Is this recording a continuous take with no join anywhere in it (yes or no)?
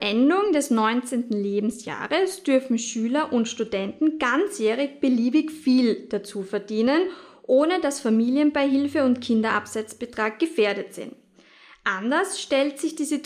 yes